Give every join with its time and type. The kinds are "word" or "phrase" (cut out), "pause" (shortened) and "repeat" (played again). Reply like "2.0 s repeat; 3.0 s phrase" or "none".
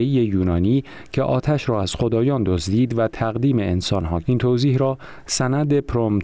4.2 s word

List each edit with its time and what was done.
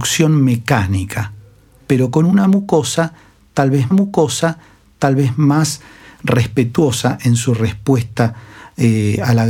3.9 s repeat

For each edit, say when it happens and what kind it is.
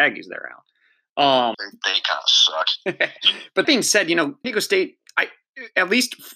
1.5 s word; 3.2 s word; 3.6 s word; 4.4 s word

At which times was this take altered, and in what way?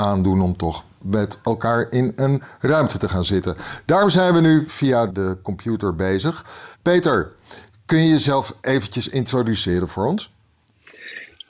6.7 s pause; 8.6 s pause

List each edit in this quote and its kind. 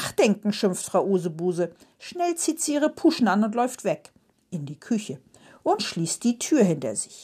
none

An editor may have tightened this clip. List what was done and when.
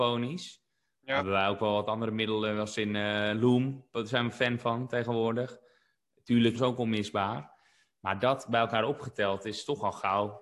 6.5 s word

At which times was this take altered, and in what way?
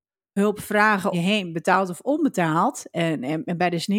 1.1 s word

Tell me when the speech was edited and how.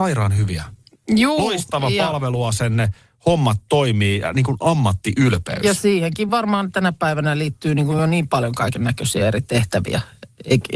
none

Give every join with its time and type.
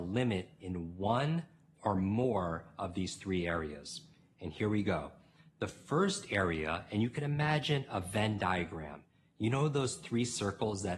none

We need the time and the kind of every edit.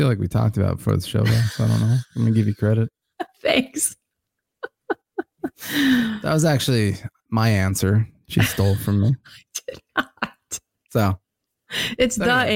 none

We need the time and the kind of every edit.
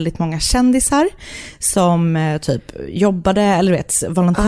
none

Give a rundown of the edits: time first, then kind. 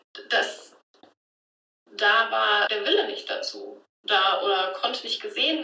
2.7 s word

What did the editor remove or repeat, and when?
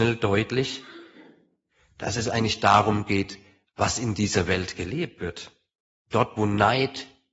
none

